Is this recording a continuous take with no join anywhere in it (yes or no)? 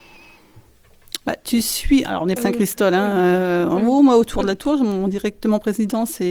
no